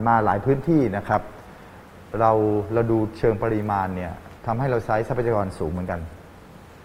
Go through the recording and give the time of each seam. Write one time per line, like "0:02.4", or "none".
0:04.4